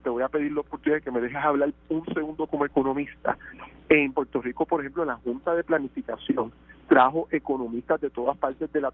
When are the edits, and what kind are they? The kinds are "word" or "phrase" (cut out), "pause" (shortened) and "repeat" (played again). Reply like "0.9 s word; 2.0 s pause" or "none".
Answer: none